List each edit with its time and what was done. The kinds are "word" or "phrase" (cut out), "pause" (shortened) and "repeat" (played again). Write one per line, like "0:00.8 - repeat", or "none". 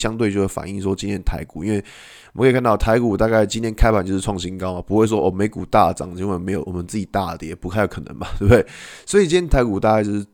none